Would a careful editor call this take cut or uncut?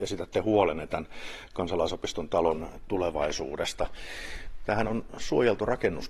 uncut